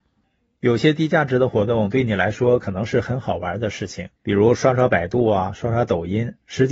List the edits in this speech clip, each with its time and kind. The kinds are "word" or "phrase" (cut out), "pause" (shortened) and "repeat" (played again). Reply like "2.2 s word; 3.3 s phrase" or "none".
4.2 s pause